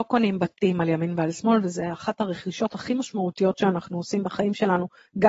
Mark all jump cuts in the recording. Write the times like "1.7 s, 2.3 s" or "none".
none